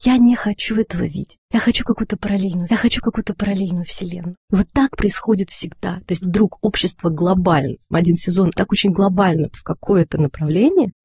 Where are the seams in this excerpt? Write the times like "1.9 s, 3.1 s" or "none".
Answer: 2.7 s, 6.2 s, 7.9 s, 8.5 s, 9.5 s

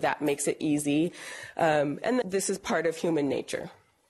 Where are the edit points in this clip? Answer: 2.2 s

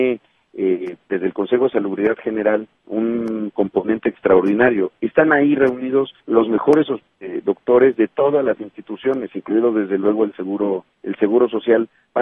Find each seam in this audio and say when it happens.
6.2 s, 10.9 s

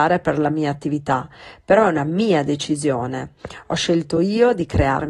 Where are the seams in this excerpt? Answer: none

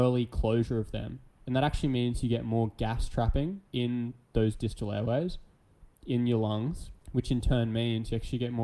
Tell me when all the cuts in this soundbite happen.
1.3 s, 3.7 s, 5.9 s, 7.0 s

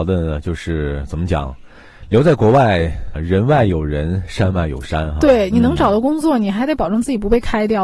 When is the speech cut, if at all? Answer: 3.1 s

